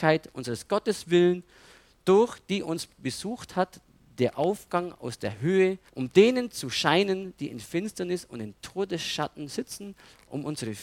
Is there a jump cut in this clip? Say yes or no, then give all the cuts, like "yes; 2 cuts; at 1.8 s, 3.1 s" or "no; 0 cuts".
yes; 1 cut; at 5.9 s